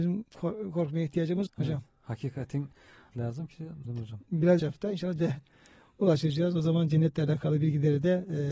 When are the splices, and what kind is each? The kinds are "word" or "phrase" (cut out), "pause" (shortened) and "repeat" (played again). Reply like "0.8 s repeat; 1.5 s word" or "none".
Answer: 1.5 s word; 3.1 s phrase; 3.8 s phrase; 4.6 s phrase; 5.2 s word